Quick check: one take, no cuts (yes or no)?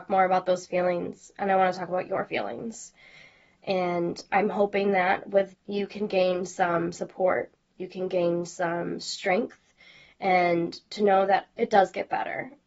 no